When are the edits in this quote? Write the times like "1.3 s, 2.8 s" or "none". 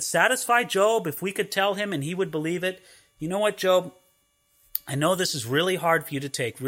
none